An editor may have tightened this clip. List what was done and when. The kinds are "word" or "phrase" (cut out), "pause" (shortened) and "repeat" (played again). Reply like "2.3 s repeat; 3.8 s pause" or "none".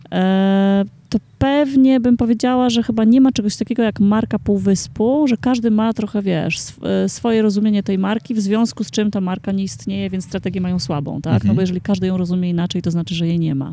none